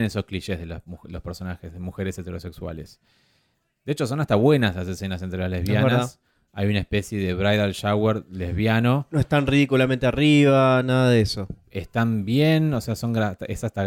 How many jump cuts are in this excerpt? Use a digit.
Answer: 0